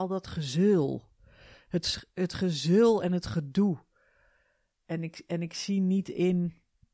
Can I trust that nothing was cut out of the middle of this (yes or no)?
yes